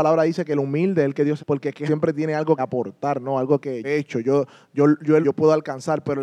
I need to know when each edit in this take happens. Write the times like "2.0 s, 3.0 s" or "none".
1.4 s, 1.9 s, 2.6 s, 3.8 s, 5.2 s